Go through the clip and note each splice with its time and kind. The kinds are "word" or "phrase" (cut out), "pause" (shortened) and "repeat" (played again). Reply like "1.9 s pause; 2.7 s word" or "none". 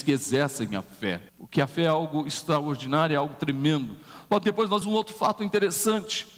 1.3 s pause; 4.8 s word